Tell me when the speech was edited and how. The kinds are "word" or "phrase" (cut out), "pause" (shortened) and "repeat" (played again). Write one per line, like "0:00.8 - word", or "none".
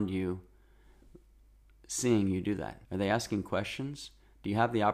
0:02.8 - pause